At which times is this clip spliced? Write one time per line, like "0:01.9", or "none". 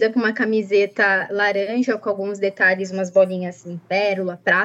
none